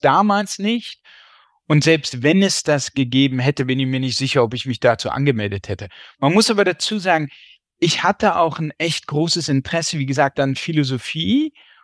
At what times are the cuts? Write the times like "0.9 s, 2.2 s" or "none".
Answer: none